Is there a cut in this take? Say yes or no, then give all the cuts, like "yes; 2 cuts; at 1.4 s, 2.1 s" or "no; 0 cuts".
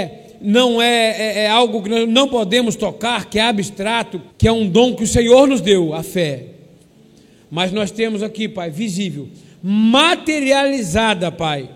yes; 1 cut; at 4.3 s